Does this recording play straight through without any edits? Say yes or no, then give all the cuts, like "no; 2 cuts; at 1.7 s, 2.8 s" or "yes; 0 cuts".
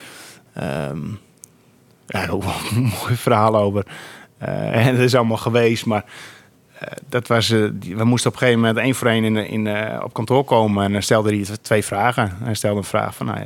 yes; 0 cuts